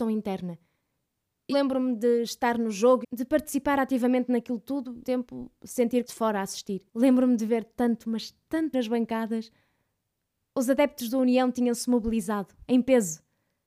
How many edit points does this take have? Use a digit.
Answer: 6